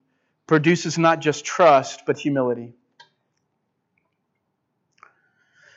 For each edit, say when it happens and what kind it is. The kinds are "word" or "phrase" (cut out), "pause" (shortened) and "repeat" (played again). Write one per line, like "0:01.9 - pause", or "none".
none